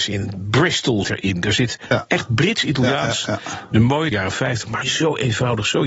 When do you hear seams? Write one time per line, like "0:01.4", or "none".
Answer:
0:01.0
0:04.1
0:04.8